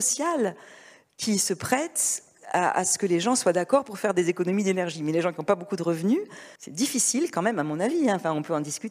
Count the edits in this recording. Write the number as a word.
one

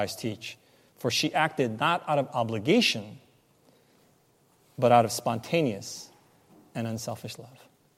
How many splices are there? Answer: zero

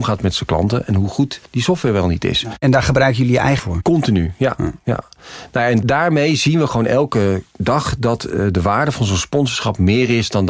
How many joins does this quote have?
two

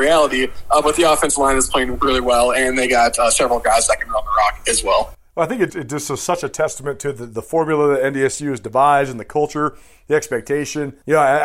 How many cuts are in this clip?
one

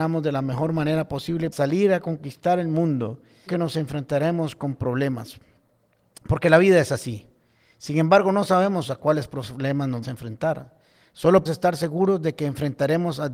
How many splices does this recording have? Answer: four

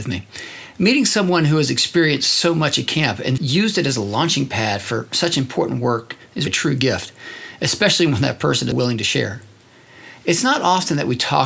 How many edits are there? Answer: three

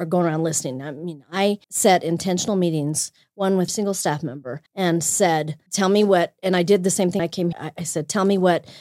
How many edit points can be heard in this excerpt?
six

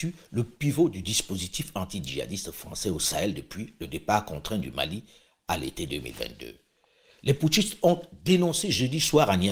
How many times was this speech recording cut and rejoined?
zero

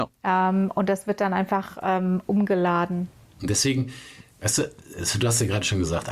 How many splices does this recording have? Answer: zero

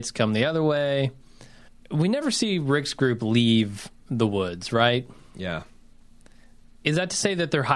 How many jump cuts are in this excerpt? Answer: one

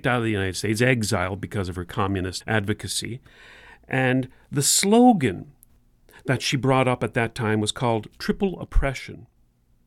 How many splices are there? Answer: one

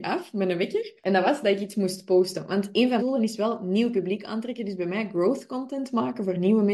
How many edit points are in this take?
one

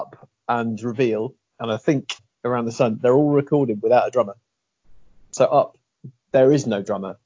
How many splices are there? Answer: zero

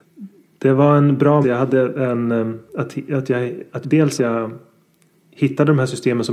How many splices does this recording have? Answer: four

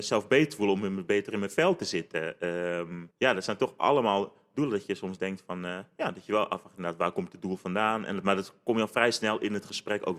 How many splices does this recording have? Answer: one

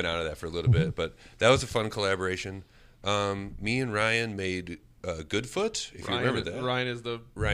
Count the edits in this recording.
zero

